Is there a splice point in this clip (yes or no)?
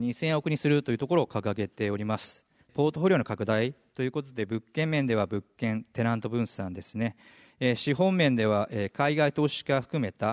yes